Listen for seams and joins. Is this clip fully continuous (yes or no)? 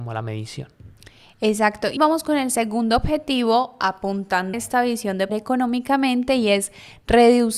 no